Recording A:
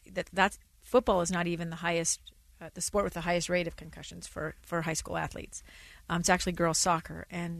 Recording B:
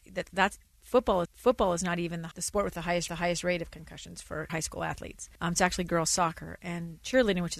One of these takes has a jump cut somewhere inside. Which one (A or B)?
B